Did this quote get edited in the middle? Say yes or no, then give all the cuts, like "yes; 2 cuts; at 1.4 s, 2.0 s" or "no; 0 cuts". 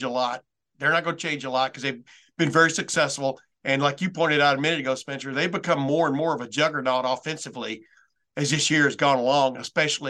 no; 0 cuts